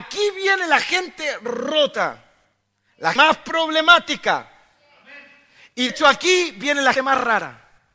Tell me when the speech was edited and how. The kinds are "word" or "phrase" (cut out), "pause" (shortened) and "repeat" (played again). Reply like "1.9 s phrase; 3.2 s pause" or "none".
3.2 s word; 5.9 s word; 7.0 s word